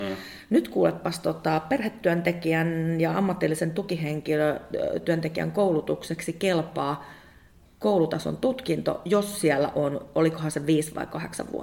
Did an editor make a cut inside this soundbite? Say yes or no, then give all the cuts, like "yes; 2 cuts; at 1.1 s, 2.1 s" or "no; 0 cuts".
no; 0 cuts